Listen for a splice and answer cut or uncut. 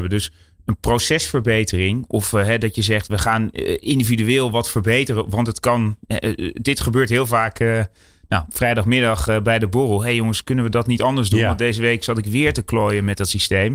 uncut